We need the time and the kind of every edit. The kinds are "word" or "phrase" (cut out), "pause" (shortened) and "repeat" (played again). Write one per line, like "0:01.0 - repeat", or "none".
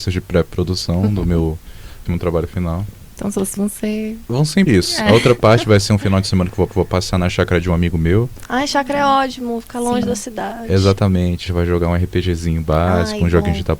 0:02.1 - phrase
0:03.6 - word
0:04.7 - word
0:06.7 - repeat
0:11.5 - word